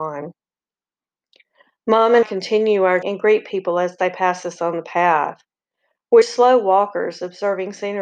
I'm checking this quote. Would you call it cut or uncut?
cut